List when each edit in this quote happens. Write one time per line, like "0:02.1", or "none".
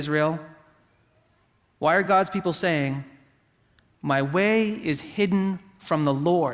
none